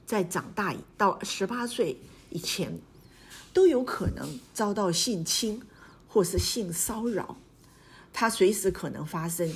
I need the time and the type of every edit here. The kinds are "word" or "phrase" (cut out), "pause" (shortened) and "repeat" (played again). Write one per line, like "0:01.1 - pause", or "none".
0:00.9 - pause